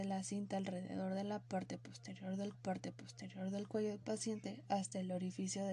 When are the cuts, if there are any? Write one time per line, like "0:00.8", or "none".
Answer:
0:02.5

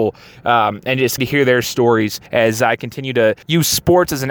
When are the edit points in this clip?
0:01.2
0:02.3
0:03.4

